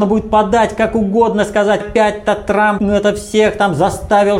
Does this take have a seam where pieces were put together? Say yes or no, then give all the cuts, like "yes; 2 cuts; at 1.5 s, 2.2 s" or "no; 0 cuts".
yes; 2 cuts; at 1.8 s, 2.8 s